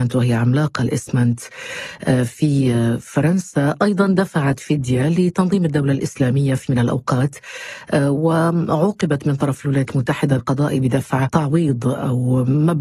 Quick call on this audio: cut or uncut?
cut